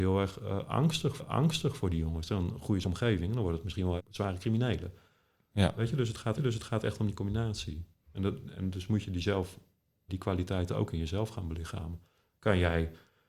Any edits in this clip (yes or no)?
yes